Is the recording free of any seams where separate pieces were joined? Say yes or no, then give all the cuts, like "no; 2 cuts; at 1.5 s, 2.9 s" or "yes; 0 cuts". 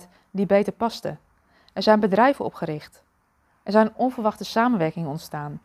yes; 0 cuts